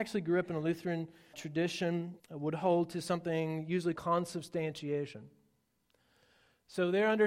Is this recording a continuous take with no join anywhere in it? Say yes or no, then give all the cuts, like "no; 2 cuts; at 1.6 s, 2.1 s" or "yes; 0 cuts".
no; 3 cuts; at 1.3 s, 2.2 s, 4.0 s